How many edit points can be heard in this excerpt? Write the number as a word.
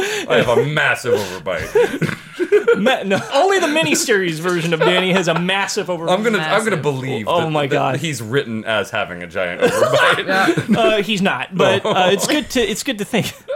one